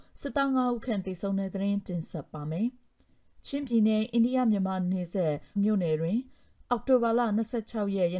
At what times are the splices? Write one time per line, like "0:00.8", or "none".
0:05.6